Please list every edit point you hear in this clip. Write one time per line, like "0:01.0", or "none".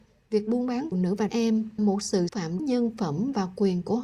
0:00.9
0:01.3
0:01.8
0:02.3
0:02.6